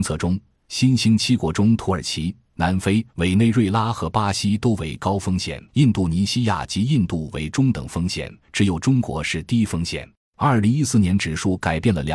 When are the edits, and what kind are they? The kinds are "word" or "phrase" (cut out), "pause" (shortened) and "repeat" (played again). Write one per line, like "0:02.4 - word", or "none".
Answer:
0:03.1 - pause
0:05.7 - pause
0:08.4 - pause
0:10.1 - pause